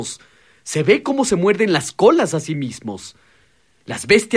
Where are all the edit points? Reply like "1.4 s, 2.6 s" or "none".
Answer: none